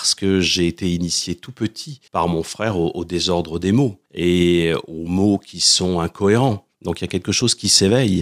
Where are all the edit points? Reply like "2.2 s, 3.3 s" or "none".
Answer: 2.1 s, 4.1 s, 6.7 s